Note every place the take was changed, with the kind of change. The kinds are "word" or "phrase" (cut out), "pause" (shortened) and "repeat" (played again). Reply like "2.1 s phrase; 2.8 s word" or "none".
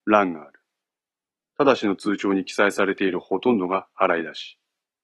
1.3 s pause